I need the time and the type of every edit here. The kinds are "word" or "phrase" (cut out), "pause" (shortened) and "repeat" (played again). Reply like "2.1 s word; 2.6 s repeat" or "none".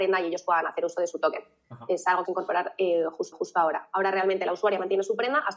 2.2 s phrase; 3.3 s repeat